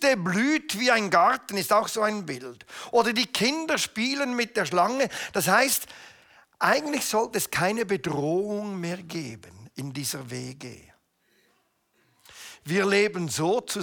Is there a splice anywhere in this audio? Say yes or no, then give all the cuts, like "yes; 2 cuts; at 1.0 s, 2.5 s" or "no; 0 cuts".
no; 0 cuts